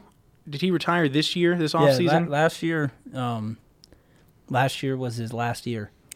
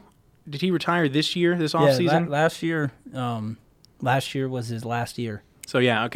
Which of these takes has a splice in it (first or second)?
second